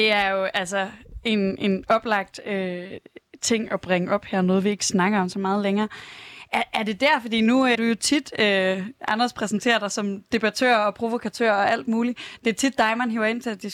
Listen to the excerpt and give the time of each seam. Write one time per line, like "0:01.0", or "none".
0:07.7